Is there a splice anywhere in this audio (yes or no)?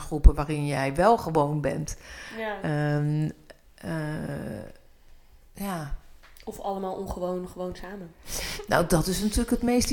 no